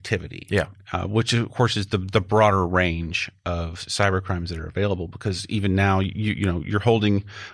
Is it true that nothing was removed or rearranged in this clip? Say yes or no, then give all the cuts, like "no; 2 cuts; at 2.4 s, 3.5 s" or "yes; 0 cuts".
yes; 0 cuts